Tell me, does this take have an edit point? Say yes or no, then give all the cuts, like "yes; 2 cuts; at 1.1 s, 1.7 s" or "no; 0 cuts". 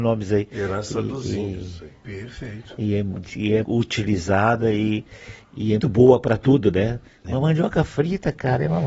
yes; 2 cuts; at 3.6 s, 5.8 s